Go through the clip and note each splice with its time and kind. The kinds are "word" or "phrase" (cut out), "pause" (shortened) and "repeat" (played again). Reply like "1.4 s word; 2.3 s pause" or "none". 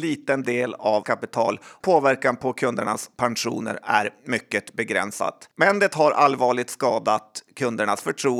1.0 s word; 1.8 s word; 5.5 s pause